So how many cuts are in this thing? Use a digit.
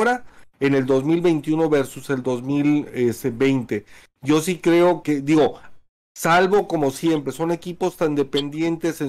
1